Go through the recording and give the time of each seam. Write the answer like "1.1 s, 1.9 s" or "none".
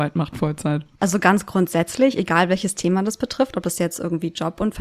none